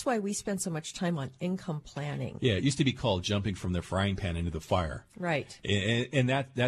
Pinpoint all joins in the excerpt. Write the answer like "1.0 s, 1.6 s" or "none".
none